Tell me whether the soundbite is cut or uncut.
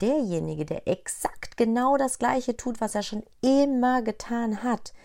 uncut